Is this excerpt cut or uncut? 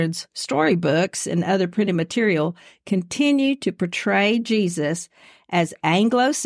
uncut